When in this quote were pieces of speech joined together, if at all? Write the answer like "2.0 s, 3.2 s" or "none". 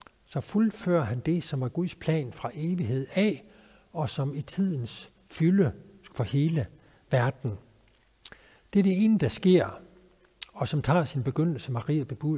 6.1 s